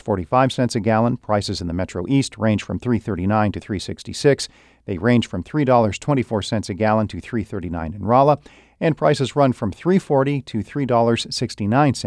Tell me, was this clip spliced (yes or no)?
no